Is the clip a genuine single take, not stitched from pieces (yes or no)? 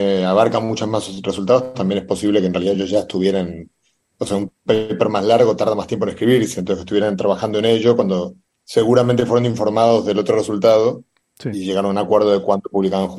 yes